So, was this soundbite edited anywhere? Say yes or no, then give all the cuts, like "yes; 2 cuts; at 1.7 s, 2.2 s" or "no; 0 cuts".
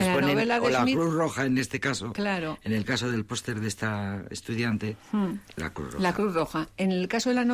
no; 0 cuts